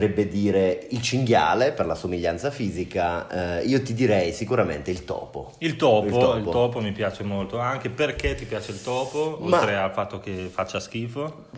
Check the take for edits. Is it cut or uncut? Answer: uncut